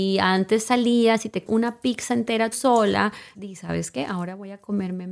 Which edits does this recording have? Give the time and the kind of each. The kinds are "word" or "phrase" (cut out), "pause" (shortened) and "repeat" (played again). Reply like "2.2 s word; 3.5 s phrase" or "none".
1.5 s word; 2.5 s word; 3.4 s word

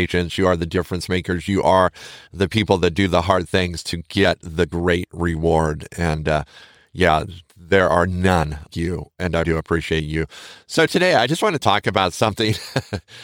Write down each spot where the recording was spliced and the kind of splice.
8.7 s word; 9.4 s word

